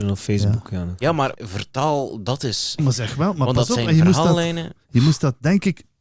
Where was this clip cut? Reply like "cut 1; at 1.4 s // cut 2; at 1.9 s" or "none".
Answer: cut 1; at 1.3 s // cut 2; at 2.8 s